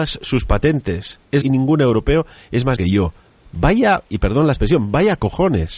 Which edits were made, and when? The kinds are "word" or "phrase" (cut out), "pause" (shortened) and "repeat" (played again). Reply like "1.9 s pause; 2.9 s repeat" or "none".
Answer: 1.4 s word; 2.8 s word